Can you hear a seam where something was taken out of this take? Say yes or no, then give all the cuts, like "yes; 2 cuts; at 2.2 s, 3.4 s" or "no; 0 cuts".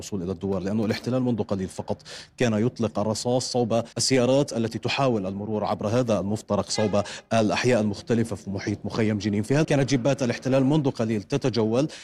yes; 2 cuts; at 3.9 s, 9.6 s